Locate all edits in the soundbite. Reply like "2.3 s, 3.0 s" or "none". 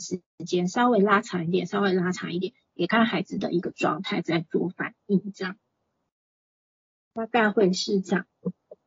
none

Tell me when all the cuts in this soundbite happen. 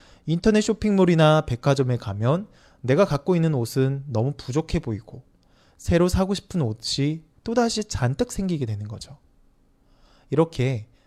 none

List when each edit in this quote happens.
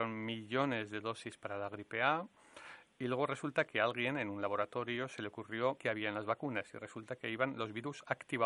5.8 s

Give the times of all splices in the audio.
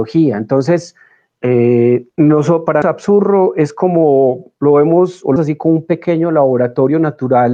2.1 s, 2.8 s, 5.4 s

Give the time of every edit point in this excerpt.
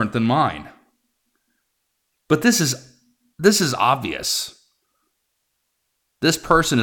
none

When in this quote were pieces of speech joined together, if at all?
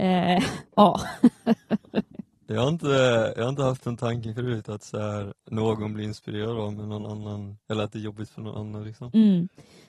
5.4 s, 7.6 s

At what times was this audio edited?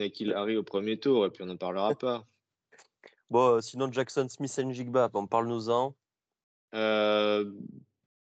none

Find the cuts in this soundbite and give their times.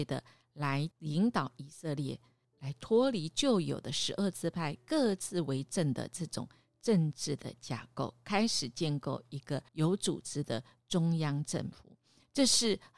0.9 s, 2.4 s, 9.7 s

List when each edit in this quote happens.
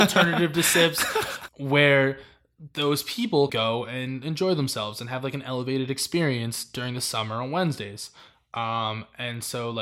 1.5 s, 3.5 s

